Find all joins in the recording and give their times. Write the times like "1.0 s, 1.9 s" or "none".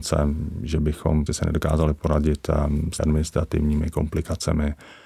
1.3 s, 3.0 s

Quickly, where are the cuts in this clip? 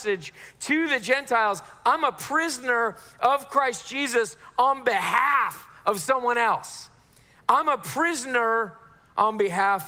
none

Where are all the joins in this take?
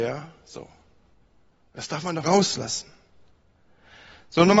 2.2 s

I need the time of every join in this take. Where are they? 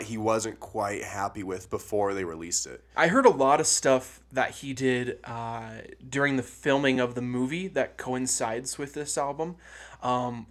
none

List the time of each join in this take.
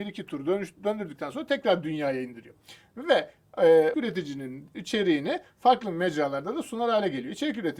3.9 s

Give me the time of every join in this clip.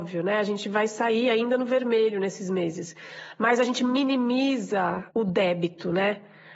5.1 s

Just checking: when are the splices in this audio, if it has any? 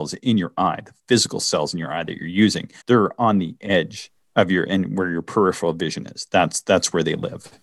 2.8 s, 4.2 s

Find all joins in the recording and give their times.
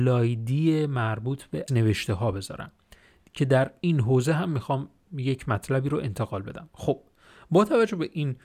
1.7 s

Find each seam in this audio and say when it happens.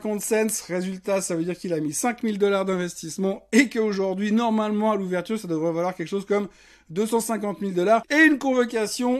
none

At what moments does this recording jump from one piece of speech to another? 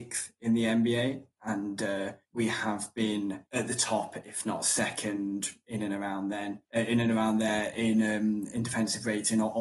2.2 s, 3.5 s, 6.6 s

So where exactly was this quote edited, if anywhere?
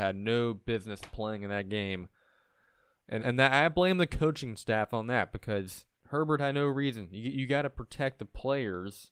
3.2 s, 5.9 s

